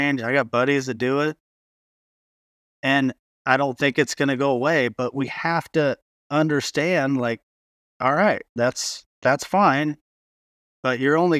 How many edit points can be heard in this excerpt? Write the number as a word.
one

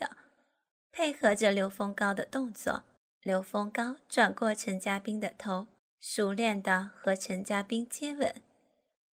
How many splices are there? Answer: two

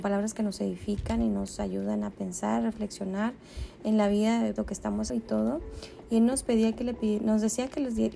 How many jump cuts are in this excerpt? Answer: two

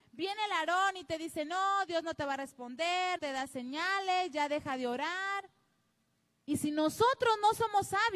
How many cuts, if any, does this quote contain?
one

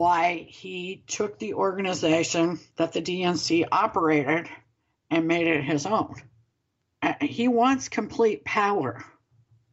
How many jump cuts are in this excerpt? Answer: zero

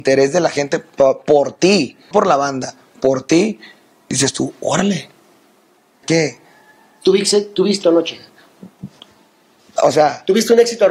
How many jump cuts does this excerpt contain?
three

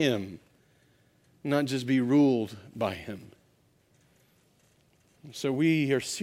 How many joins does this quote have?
zero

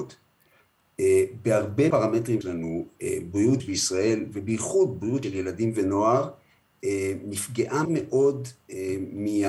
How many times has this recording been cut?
five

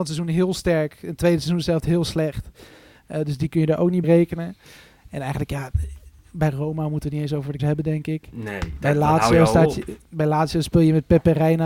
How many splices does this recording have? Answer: two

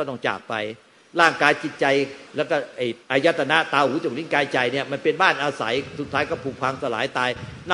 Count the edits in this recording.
two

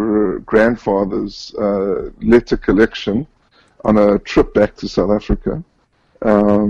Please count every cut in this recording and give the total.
zero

